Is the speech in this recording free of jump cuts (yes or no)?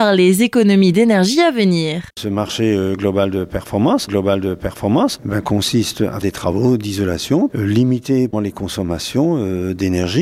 no